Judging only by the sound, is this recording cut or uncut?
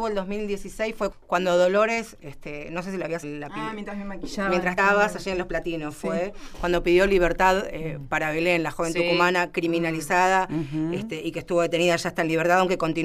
cut